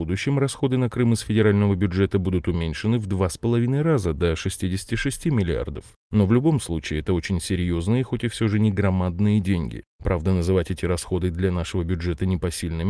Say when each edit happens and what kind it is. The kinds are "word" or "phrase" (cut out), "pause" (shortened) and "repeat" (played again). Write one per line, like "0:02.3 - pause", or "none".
none